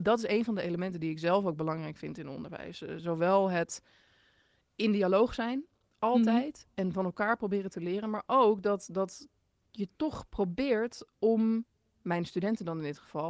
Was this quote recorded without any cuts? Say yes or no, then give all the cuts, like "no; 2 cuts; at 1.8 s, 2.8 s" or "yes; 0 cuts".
yes; 0 cuts